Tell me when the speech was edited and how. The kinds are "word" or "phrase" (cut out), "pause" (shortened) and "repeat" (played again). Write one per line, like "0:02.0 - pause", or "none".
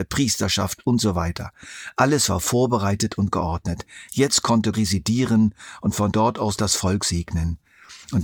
0:04.7 - phrase